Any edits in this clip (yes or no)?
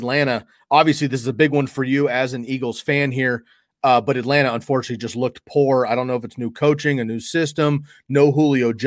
no